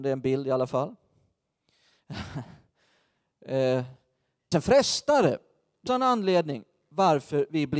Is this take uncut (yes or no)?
no